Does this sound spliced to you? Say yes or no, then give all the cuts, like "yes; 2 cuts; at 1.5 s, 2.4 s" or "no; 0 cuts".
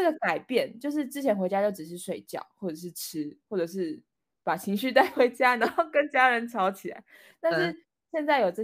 no; 0 cuts